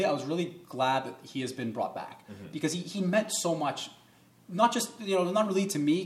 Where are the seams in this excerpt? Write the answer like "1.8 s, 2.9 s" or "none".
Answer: none